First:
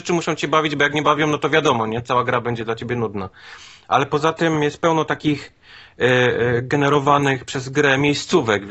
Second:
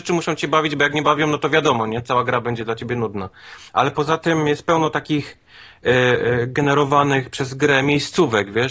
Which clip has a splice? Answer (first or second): second